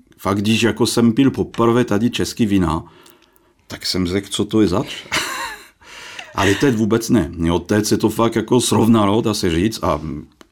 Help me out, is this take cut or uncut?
uncut